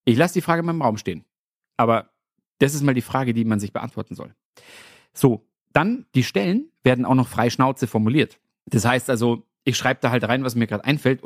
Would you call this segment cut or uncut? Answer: uncut